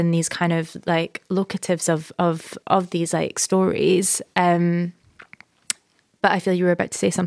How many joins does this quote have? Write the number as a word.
one